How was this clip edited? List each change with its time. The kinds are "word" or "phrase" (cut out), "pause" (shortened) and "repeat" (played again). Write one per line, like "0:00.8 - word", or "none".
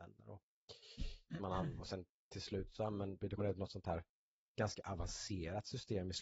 0:03.4 - word